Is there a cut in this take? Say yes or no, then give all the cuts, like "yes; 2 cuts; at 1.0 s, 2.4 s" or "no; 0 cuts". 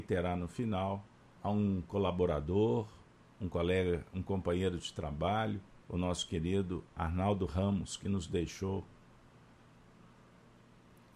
yes; 4 cuts; at 1.1 s, 3.2 s, 5.8 s, 6.9 s